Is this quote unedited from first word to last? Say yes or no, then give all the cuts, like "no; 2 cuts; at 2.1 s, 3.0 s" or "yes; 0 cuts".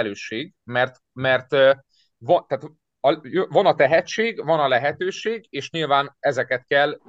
yes; 0 cuts